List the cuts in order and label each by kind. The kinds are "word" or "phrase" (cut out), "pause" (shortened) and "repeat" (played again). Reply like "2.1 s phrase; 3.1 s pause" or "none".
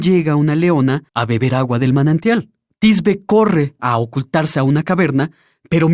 1.1 s pause; 2.7 s pause; 3.8 s word